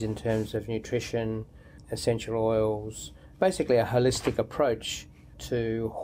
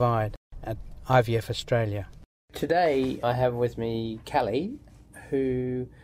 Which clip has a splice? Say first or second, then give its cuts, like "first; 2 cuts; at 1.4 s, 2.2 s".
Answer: second; 1 cut; at 2.3 s